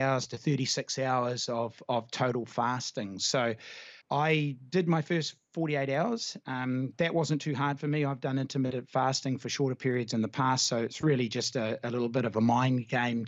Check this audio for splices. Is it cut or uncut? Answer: cut